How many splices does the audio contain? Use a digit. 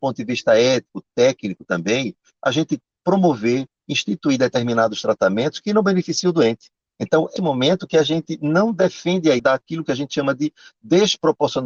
3